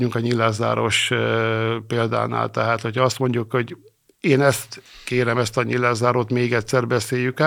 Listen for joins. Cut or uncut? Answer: uncut